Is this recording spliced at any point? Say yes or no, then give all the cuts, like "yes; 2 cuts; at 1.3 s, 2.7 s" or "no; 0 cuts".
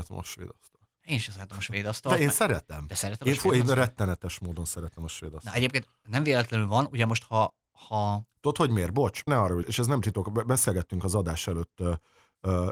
yes; 2 cuts; at 9.3 s, 9.6 s